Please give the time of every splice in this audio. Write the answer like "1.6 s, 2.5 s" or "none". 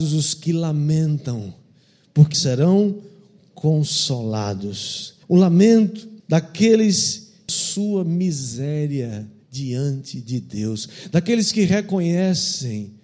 2.3 s, 5.2 s, 6.2 s, 7.5 s